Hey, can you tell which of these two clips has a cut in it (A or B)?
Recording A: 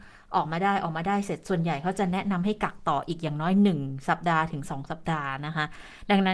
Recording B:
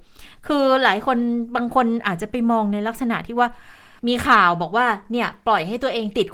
B